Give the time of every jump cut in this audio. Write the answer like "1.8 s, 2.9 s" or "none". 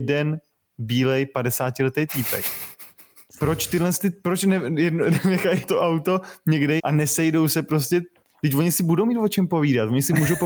5.6 s, 6.8 s